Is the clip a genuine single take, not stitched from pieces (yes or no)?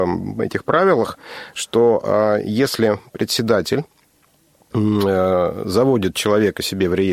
yes